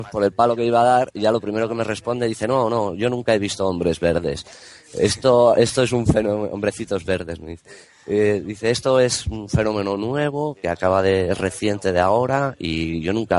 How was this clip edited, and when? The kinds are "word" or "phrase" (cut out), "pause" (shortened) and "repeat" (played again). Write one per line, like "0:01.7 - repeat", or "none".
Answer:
none